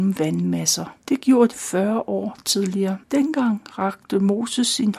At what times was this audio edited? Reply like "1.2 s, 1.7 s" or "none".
1.0 s, 1.5 s, 3.0 s